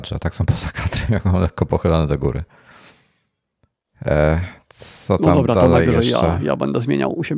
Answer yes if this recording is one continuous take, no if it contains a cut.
yes